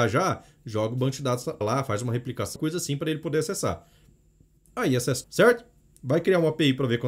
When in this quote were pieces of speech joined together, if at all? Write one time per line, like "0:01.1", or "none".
0:01.6
0:02.6
0:05.2